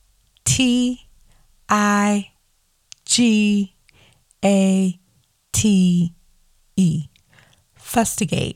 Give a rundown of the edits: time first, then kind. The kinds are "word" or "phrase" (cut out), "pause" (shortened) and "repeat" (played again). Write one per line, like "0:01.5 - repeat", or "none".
none